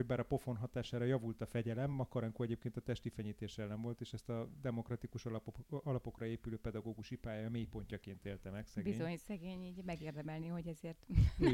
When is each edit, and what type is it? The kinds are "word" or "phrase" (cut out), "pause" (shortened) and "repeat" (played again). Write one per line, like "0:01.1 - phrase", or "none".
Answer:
none